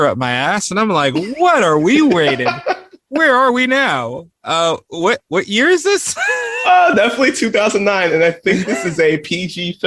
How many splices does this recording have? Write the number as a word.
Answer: zero